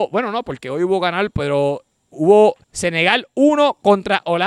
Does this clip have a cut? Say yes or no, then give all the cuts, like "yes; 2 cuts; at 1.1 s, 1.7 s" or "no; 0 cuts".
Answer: yes; 1 cut; at 2.6 s